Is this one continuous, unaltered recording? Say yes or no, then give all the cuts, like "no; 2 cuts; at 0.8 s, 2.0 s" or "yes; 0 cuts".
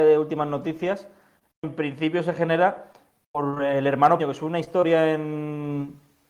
no; 1 cut; at 4.2 s